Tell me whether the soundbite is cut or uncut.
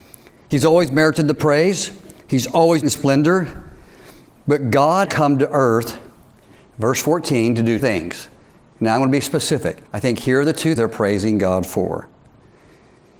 cut